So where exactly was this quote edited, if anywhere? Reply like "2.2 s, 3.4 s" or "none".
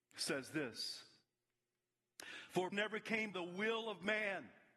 2.7 s, 3.3 s